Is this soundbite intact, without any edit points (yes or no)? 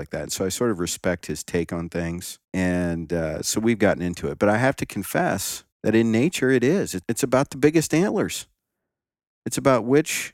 no